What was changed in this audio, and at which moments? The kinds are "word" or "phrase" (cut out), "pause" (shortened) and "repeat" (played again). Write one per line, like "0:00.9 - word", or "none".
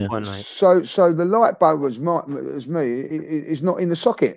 none